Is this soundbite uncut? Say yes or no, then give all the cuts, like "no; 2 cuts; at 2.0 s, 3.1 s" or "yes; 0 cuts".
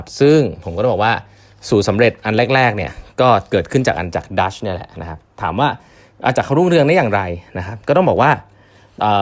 yes; 0 cuts